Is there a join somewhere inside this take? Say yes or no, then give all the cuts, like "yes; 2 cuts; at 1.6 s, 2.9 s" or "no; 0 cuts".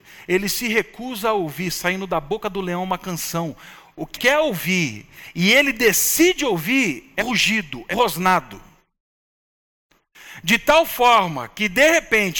yes; 3 cuts; at 4.1 s, 7.2 s, 7.9 s